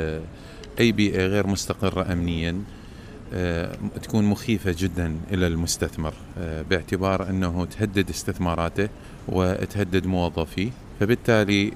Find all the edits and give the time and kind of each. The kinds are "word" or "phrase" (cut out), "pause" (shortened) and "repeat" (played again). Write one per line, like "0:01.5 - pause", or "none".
none